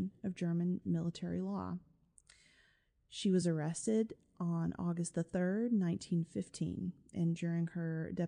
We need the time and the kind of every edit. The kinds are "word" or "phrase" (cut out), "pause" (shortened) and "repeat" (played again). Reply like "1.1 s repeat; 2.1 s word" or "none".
none